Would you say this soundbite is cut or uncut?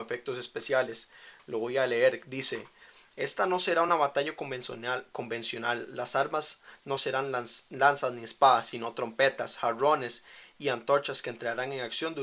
uncut